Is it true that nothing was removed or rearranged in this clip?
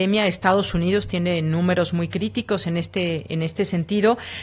yes; 0 cuts

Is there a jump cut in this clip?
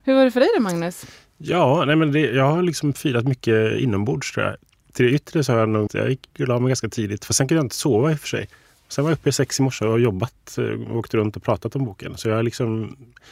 yes; 1 cut; at 5.9 s

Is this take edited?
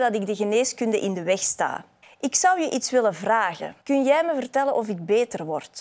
yes; 2 cuts; at 2.0 s, 3.8 s

